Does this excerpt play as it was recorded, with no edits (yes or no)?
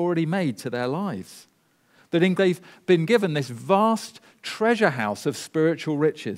no